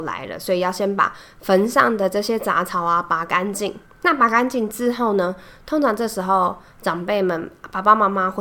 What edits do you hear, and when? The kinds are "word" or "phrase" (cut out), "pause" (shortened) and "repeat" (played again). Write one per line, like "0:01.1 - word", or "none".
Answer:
0:03.9 - pause